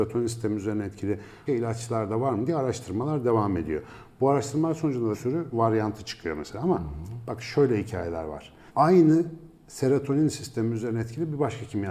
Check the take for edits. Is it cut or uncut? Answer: cut